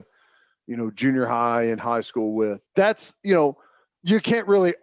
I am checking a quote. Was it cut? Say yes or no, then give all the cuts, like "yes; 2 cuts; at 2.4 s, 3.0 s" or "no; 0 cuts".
yes; 1 cut; at 2.7 s